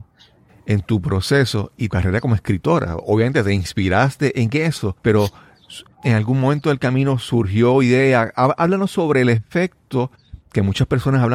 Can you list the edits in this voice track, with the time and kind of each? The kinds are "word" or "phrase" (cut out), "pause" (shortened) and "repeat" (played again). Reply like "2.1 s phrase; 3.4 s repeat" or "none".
1.9 s phrase; 5.0 s pause